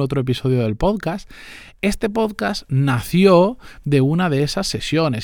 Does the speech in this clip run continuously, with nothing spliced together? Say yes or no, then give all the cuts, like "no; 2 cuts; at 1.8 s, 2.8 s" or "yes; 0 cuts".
yes; 0 cuts